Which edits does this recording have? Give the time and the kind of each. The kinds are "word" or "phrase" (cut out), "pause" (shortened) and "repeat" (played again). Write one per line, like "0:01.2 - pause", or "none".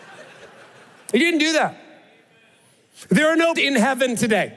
0:03.6 - word

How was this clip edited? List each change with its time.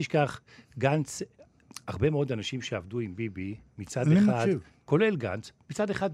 none

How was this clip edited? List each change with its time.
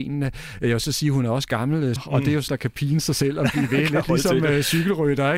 0:02.0 - word
0:02.5 - word

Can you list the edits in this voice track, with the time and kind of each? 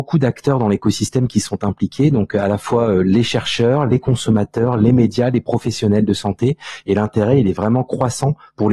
none

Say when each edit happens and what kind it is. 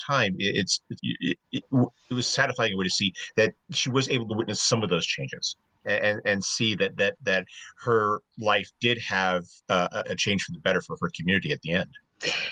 0:01.0 - word
0:01.4 - pause
0:03.6 - pause
0:05.8 - word
0:10.0 - word

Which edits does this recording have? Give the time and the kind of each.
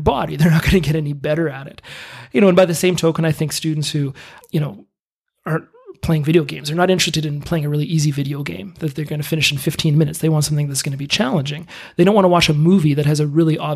0:04.4 - word

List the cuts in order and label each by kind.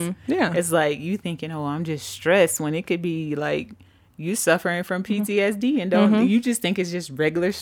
none

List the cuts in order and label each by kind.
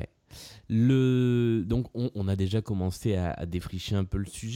none

